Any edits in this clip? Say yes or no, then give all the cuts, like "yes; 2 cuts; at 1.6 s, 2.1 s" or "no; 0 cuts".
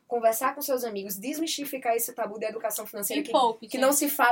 no; 0 cuts